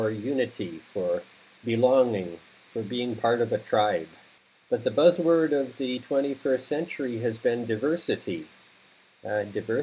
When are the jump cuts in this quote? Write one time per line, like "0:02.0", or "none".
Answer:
none